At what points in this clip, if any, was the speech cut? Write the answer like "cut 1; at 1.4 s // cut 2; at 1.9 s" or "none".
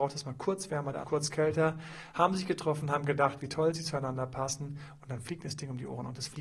cut 1; at 1.0 s